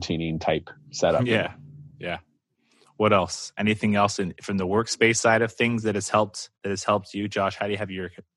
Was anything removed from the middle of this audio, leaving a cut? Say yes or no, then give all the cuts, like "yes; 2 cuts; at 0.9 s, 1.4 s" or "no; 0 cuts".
yes; 2 cuts; at 1.9 s, 6.6 s